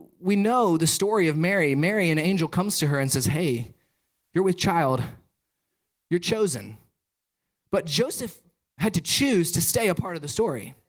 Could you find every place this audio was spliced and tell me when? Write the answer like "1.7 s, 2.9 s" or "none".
none